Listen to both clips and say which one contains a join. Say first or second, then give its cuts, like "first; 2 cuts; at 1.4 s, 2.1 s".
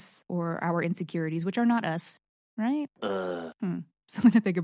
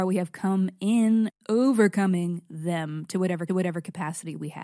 second; 1 cut; at 3.5 s